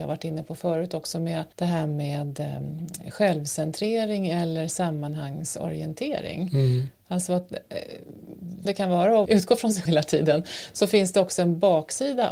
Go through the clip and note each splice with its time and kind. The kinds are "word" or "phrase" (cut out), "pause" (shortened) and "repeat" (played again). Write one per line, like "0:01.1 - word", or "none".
0:01.5 - pause
0:08.7 - phrase
0:09.3 - word
0:09.9 - word